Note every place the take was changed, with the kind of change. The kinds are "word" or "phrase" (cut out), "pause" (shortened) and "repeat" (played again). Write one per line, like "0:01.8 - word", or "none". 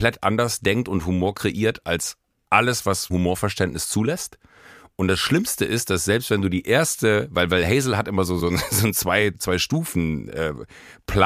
0:03.1 - word
0:08.4 - word
0:09.3 - word